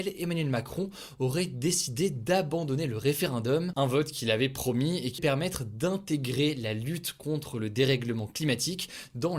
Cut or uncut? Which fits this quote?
cut